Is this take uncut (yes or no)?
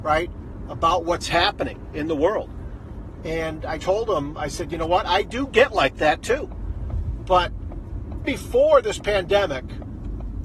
no